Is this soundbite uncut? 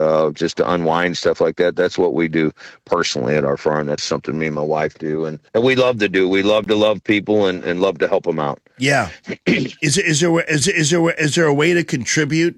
no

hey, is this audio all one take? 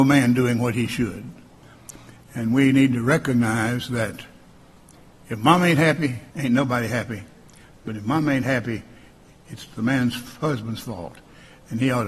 no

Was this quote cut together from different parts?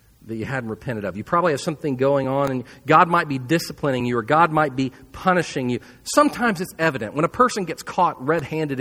no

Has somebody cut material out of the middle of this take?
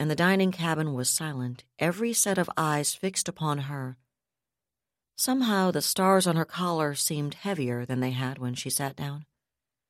no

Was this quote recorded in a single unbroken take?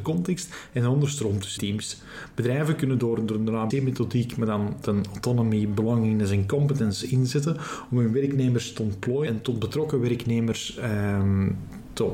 no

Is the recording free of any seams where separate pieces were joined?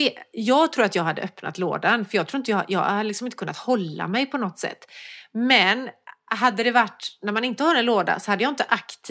yes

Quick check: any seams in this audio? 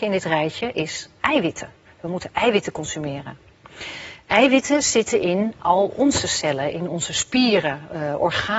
no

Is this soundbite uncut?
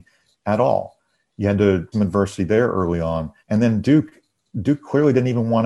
no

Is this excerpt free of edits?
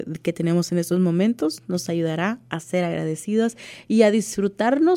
yes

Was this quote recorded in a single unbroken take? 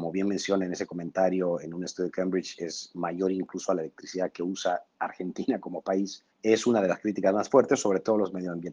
no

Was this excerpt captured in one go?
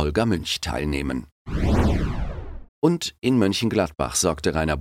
no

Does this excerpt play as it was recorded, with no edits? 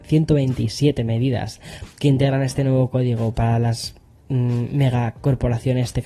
yes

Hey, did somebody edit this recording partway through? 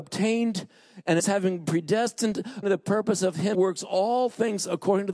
yes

